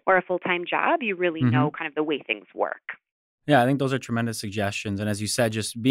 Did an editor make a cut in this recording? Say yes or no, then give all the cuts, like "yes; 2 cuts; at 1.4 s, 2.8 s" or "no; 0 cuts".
no; 0 cuts